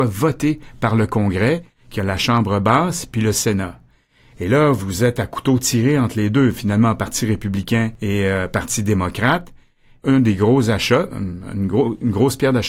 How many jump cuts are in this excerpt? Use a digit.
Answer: 0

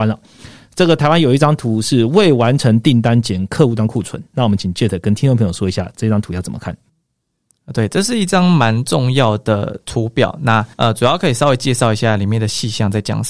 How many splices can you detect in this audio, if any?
2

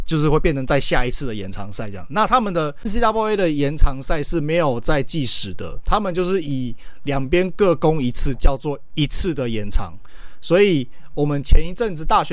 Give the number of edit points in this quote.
1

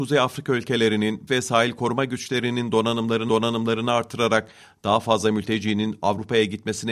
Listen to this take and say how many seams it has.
2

